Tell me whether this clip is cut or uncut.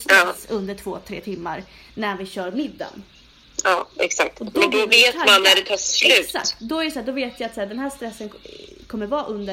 uncut